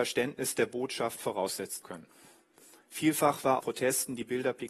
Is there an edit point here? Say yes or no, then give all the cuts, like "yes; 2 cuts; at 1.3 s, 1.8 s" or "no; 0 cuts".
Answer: yes; 2 cuts; at 1.8 s, 3.6 s